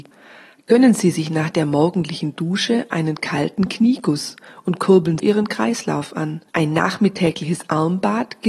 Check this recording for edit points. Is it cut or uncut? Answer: cut